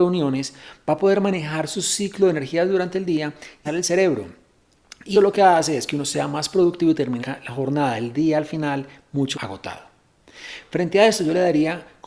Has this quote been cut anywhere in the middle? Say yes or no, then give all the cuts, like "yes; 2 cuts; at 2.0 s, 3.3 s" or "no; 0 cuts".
yes; 4 cuts; at 3.6 s, 5.1 s, 7.2 s, 9.3 s